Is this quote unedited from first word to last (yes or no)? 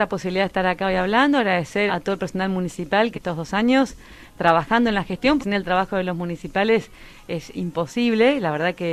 no